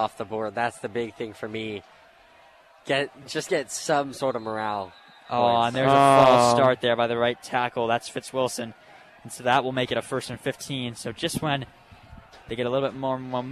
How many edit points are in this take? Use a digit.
0